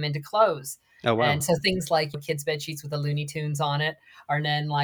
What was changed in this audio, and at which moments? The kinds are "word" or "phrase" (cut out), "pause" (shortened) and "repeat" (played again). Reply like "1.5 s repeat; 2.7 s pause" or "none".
none

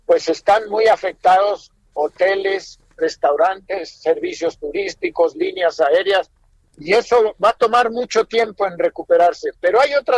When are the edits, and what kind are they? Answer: none

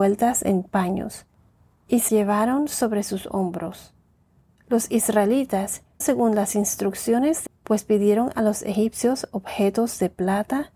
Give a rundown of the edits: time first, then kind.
2.1 s word; 6.0 s word; 7.5 s word

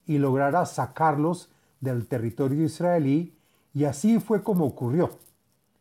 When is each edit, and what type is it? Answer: none

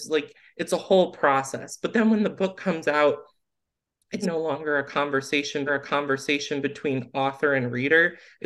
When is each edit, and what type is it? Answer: 4.2 s word; 5.7 s repeat

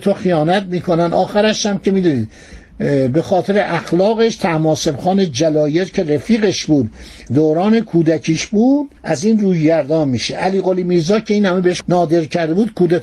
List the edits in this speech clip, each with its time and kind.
7.3 s word; 9.0 s pause; 11.8 s word

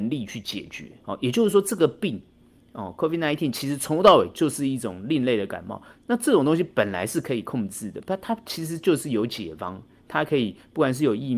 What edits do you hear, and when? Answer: 1.0 s pause

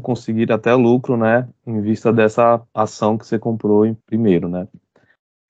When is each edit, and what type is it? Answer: 4.0 s pause

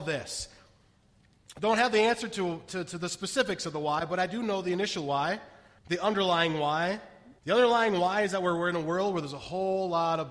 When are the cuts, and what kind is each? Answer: 5.8 s pause; 7.4 s pause

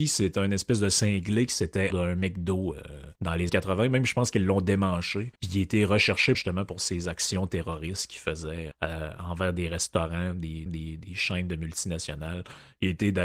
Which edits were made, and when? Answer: 1.9 s phrase; 3.2 s pause; 3.5 s word; 5.4 s pause; 6.3 s phrase; 8.7 s word; 10.7 s repeat

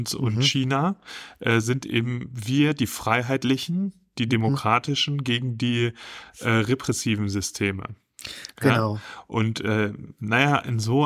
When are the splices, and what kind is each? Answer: none

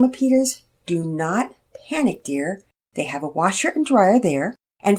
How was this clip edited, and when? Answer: none

